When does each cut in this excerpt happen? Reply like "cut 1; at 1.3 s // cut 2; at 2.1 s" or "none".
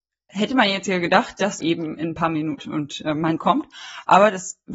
cut 1; at 1.6 s // cut 2; at 2.6 s // cut 3; at 3.4 s